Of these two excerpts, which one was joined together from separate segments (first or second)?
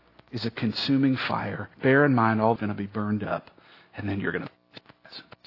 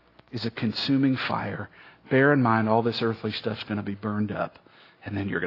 first